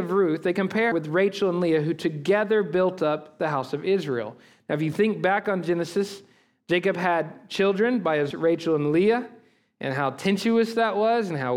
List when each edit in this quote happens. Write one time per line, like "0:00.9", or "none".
0:00.9
0:08.3

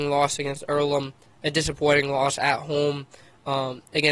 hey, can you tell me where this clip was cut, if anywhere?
none

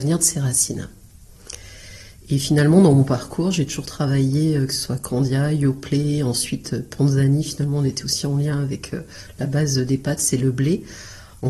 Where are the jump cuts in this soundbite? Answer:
none

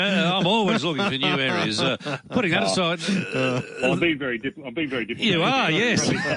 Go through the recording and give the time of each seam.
none

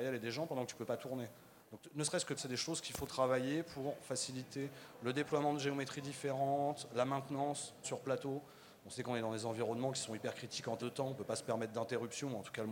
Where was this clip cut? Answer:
0:01.6
0:02.4
0:07.8
0:10.8

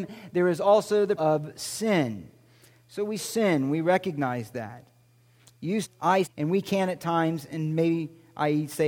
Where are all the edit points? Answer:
0:01.2
0:03.2
0:05.8
0:06.2

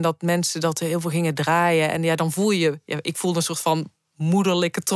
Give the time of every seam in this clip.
none

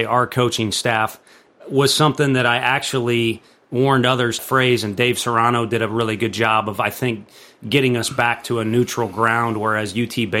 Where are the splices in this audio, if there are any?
0:04.4

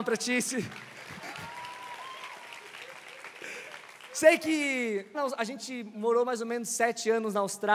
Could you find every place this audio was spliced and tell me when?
0:05.1

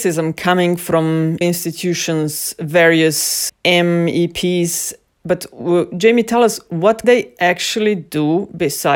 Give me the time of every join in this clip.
0:01.4
0:03.5
0:07.0

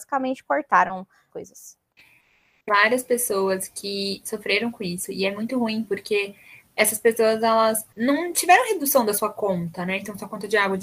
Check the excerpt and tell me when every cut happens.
0:01.3
0:02.7
0:07.9

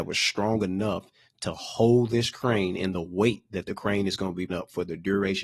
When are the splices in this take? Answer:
0:04.5

